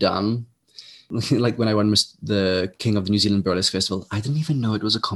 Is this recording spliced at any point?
no; 0 cuts

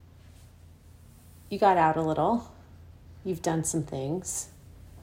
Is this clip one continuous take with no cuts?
yes; 0 cuts

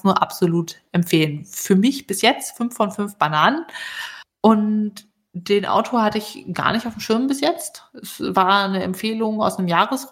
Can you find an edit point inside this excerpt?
no; 0 cuts

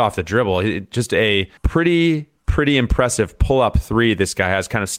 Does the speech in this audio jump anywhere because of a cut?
yes; 1 cut; at 1.6 s

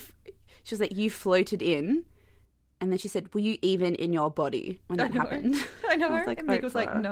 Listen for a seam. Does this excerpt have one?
no; 0 cuts

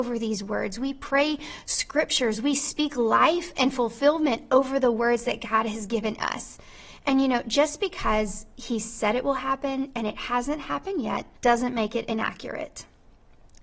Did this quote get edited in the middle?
yes; 1 cut; at 11.3 s

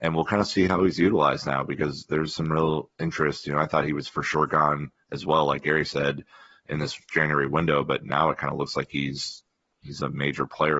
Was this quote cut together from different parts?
no; 0 cuts

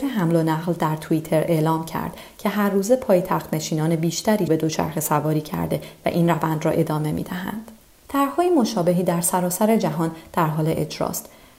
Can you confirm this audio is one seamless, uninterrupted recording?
no; 2 cuts; at 4.5 s, 7.8 s

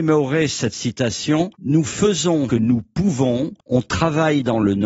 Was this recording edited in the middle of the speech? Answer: yes; 3 cuts; at 1.5 s, 2.5 s, 3.6 s

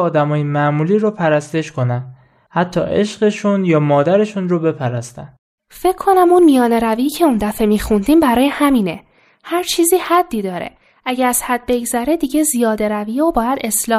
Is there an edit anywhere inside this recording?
no; 0 cuts

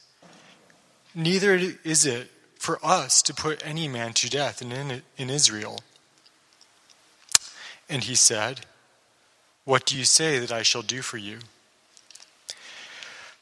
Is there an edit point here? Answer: no; 0 cuts

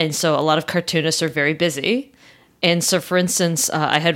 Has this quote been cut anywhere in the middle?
no; 0 cuts

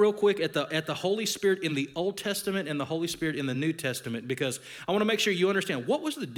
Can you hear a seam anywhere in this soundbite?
no; 0 cuts

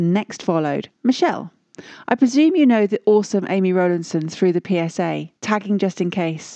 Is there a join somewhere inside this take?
yes; 2 cuts; at 0.9 s, 5.4 s

